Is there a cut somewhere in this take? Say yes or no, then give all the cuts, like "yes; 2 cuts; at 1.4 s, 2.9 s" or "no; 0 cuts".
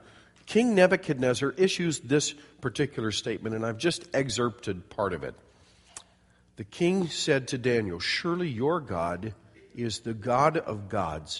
no; 0 cuts